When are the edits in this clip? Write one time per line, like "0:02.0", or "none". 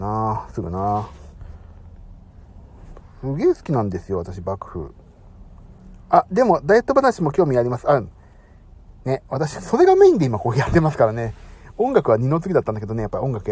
none